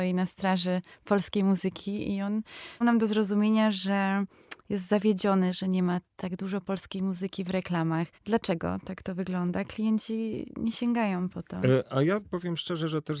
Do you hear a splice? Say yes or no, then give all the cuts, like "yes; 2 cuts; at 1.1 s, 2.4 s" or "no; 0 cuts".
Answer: yes; 3 cuts; at 2.8 s, 6.1 s, 8.1 s